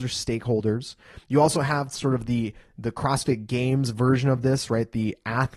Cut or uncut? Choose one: uncut